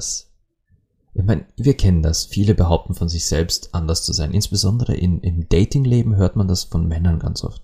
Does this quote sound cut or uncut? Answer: uncut